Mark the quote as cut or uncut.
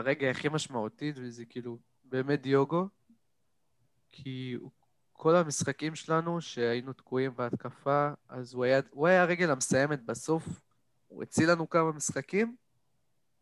uncut